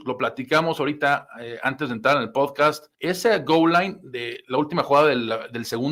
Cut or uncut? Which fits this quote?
cut